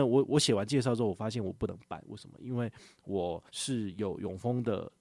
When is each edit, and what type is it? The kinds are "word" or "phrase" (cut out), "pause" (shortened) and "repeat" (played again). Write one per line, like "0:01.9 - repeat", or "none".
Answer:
0:03.5 - pause